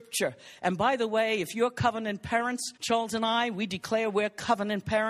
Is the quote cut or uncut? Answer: cut